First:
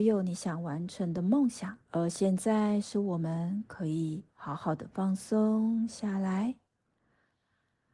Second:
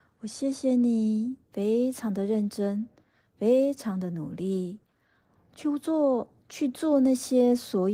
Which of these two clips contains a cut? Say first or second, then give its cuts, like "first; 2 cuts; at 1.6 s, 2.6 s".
first; 2 cuts; at 1.8 s, 4.3 s